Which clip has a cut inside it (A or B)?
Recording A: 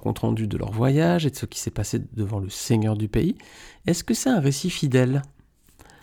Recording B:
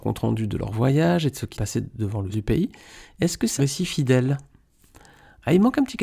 B